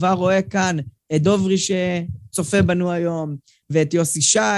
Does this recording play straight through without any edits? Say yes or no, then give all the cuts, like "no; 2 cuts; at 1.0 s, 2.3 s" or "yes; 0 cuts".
no; 1 cut; at 1.2 s